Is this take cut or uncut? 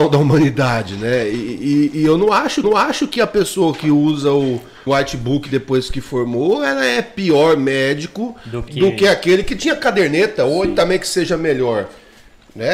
cut